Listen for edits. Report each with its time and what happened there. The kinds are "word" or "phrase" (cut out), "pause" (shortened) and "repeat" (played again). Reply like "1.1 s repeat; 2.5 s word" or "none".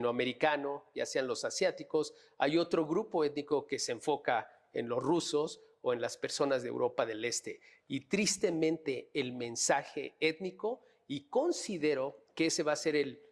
none